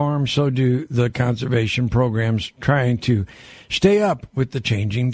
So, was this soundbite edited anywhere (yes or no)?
no